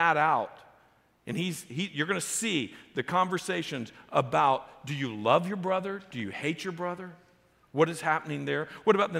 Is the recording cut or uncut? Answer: uncut